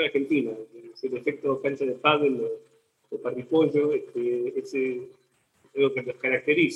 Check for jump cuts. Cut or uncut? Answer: uncut